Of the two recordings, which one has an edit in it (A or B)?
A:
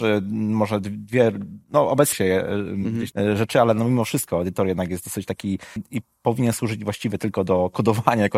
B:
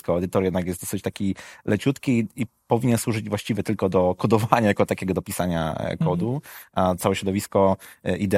A